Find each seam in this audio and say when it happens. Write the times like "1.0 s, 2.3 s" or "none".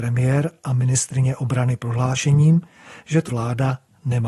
3.3 s